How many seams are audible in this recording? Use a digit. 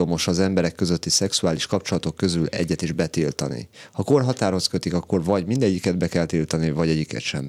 0